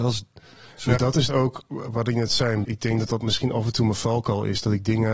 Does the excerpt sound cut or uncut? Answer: cut